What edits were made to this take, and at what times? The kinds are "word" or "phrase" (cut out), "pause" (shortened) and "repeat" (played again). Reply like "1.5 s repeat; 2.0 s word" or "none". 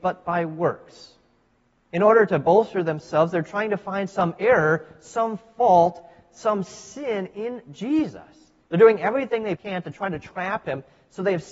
1.5 s pause; 8.6 s pause; 9.6 s word

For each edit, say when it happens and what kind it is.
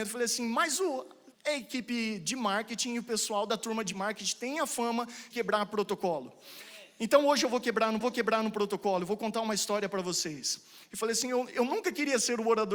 1.3 s pause; 5.3 s word; 8.0 s repeat

